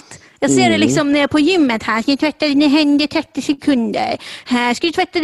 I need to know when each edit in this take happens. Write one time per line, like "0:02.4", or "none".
none